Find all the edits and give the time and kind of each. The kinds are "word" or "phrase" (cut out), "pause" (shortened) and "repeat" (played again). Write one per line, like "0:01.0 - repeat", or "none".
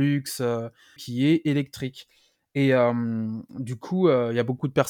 0:01.0 - word